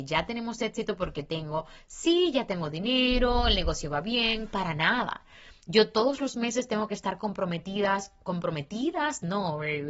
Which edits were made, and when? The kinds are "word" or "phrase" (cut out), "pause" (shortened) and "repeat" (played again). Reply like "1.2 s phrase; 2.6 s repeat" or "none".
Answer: none